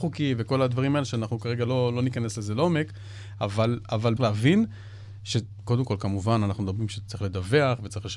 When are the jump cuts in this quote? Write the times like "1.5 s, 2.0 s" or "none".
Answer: 4.2 s